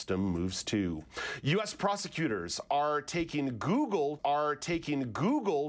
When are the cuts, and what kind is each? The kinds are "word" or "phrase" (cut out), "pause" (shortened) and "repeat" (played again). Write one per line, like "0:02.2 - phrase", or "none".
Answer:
0:04.2 - repeat